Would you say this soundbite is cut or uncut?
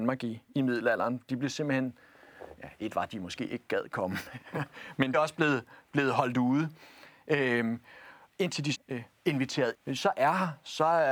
cut